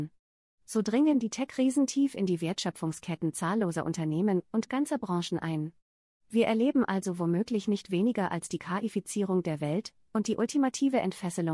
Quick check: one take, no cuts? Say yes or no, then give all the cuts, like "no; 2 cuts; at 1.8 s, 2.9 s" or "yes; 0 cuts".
yes; 0 cuts